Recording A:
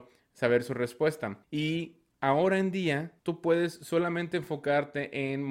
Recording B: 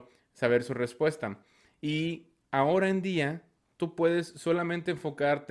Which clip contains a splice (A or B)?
A